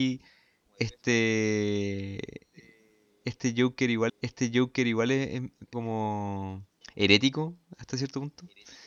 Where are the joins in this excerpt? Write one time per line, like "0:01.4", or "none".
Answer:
0:04.1
0:05.7
0:06.8